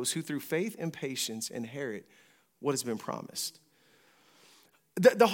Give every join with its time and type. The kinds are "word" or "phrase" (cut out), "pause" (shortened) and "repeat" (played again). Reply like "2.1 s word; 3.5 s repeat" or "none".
none